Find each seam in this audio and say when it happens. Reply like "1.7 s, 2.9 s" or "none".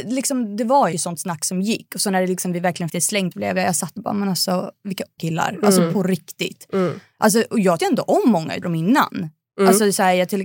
0.9 s, 2.9 s, 3.3 s, 4.0 s, 5.2 s, 7.8 s, 8.6 s